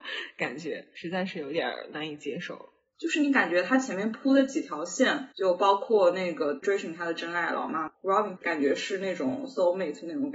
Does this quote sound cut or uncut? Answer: cut